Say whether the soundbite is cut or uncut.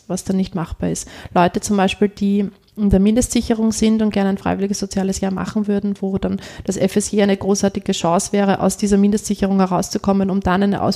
uncut